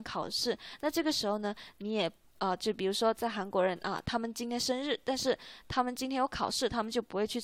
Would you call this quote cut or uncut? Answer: uncut